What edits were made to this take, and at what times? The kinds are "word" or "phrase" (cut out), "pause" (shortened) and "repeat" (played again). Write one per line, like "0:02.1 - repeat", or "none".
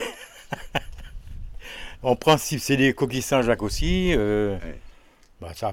none